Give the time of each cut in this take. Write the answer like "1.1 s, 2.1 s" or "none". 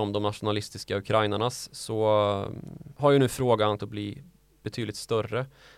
3.8 s